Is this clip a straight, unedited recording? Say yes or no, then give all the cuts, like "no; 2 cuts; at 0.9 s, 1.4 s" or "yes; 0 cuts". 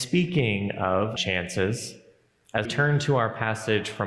no; 2 cuts; at 1.2 s, 2.6 s